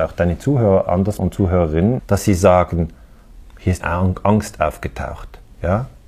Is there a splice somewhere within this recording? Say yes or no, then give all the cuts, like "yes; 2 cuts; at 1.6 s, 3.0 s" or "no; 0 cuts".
yes; 4 cuts; at 1.2 s, 2.0 s, 3.4 s, 3.8 s